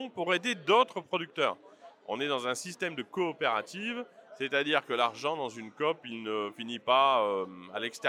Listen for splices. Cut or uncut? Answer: uncut